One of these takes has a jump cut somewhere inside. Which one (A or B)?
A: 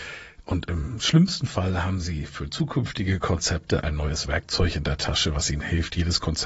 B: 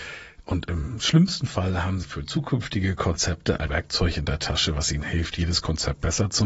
B